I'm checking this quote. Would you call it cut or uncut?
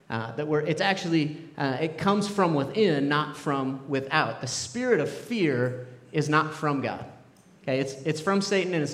uncut